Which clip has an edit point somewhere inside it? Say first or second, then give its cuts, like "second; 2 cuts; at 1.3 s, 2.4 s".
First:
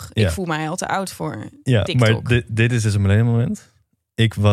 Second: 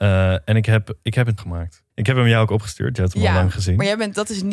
second; 2 cuts; at 1.4 s, 1.9 s